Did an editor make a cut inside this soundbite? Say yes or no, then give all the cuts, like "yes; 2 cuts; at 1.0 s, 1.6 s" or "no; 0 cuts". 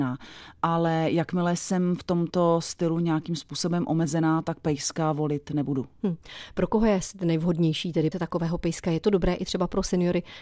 yes; 1 cut; at 8.1 s